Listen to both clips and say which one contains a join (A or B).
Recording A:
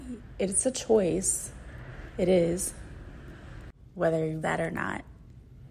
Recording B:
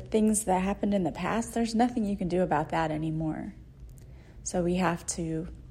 A